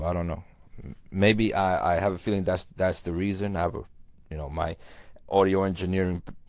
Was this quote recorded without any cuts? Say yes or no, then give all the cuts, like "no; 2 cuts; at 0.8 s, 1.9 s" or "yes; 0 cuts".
yes; 0 cuts